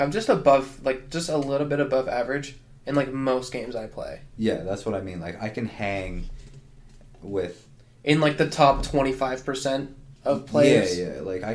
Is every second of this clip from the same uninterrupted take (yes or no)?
yes